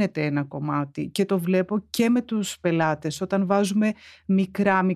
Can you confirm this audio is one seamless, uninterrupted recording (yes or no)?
yes